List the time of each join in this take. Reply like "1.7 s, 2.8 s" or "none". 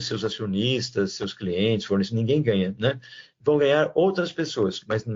none

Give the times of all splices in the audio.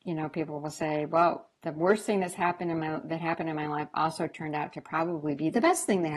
1.6 s

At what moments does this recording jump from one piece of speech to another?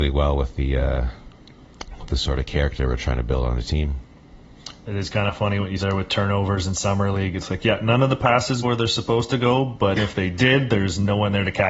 5.8 s, 8.6 s, 10.0 s

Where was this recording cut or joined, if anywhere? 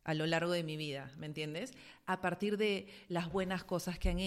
none

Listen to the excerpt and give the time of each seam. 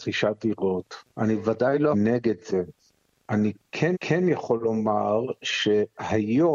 1.1 s, 1.9 s, 3.9 s

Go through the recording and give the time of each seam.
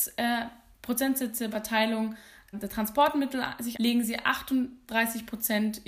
1.5 s, 2.5 s, 3.7 s

